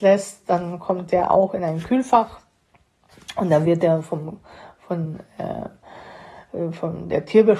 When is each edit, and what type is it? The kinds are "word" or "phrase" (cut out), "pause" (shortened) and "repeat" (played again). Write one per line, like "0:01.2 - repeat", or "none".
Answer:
none